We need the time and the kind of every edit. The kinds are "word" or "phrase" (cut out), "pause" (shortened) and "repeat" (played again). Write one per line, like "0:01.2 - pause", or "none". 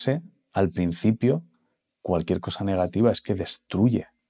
none